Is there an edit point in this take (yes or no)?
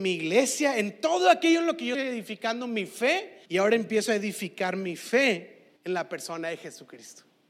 yes